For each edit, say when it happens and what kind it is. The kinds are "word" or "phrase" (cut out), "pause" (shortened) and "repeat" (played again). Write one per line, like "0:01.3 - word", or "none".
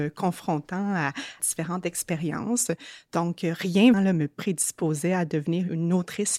0:01.4 - phrase
0:03.9 - word